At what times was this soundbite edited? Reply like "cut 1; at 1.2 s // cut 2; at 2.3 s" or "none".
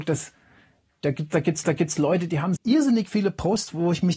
cut 1; at 1.6 s // cut 2; at 2.6 s